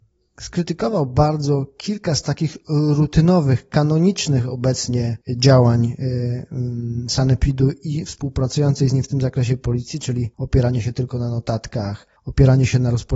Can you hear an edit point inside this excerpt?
yes; 3 cuts; at 5.2 s, 10.3 s, 12.2 s

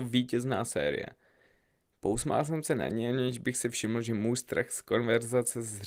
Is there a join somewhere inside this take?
no; 0 cuts

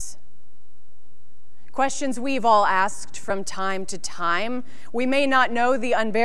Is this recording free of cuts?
yes; 0 cuts

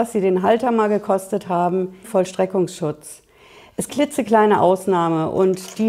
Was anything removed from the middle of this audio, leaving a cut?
yes; 2 cuts; at 2.0 s, 3.9 s

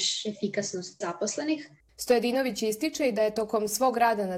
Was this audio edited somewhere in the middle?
yes; 2 cuts; at 1.0 s, 1.8 s

